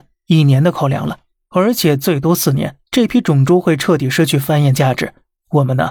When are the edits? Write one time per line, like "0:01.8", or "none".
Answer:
0:01.3